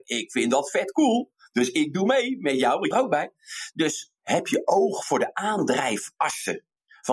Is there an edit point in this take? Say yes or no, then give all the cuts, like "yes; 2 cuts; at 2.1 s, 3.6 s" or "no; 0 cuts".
yes; 2 cuts; at 2.9 s, 4.2 s